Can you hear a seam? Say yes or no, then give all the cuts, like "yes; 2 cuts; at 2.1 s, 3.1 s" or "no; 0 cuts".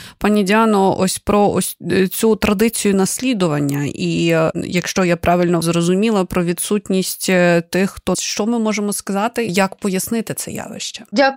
yes; 3 cuts; at 5.6 s, 8.1 s, 9.5 s